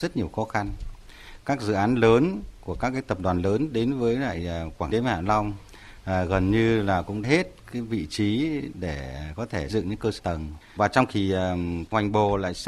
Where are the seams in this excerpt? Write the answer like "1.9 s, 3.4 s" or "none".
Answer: 4.9 s, 7.2 s, 8.7 s, 9.7 s, 10.2 s, 10.8 s, 11.1 s